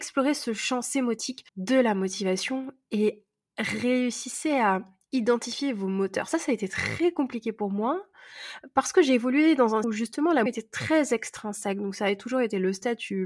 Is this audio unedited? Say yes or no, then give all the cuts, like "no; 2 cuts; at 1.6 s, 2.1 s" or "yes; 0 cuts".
no; 3 cuts; at 1.5 s, 9.8 s, 10.5 s